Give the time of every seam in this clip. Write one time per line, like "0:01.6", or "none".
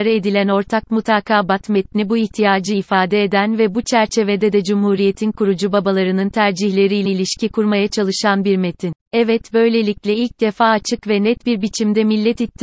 0:07.1
0:09.0